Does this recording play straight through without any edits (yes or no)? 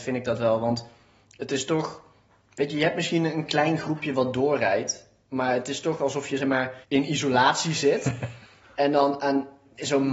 no